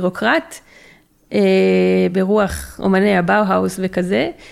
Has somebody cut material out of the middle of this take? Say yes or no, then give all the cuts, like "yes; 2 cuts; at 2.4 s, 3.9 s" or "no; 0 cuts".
no; 0 cuts